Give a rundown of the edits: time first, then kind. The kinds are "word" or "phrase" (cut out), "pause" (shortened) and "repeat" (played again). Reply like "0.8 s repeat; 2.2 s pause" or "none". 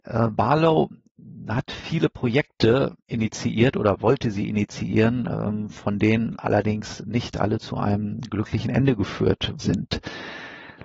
3.0 s pause; 9.6 s word